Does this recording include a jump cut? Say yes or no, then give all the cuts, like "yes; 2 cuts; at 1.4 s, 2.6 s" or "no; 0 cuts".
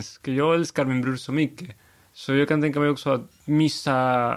no; 0 cuts